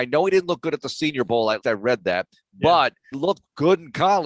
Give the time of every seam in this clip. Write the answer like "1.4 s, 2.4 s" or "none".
1.6 s, 3.1 s